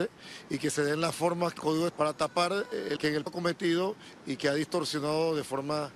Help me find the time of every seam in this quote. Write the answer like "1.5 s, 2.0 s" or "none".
1.6 s, 1.9 s, 3.0 s, 3.3 s